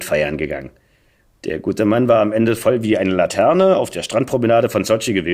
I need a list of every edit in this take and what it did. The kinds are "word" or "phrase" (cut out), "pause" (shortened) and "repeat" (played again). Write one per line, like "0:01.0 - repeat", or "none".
none